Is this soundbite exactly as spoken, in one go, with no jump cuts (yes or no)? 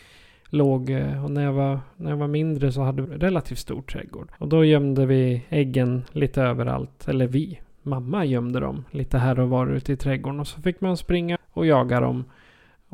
no